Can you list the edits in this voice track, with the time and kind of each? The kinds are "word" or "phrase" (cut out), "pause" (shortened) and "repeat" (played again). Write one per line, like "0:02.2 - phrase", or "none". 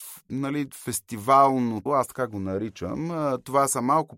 0:01.9 - word